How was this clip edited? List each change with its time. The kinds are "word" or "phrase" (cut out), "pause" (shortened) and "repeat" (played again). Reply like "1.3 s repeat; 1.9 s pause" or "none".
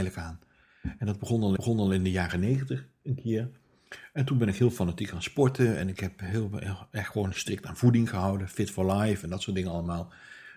1.6 s repeat